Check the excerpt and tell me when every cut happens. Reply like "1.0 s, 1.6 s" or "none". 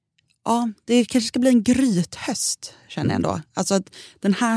none